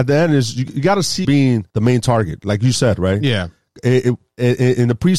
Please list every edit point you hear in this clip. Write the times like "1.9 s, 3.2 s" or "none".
1.2 s, 1.7 s